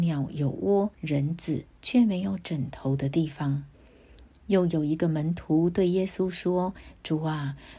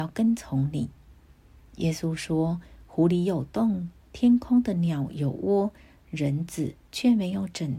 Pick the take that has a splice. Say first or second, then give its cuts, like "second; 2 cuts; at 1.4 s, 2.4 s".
first; 2 cuts; at 0.9 s, 3.7 s